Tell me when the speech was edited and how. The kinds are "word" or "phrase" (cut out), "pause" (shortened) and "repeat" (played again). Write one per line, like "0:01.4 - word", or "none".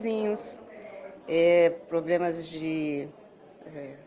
none